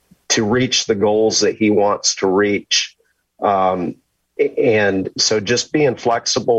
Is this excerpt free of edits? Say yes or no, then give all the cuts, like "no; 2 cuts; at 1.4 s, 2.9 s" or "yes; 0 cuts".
yes; 0 cuts